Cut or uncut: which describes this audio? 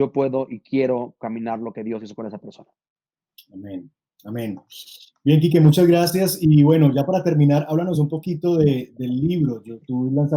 uncut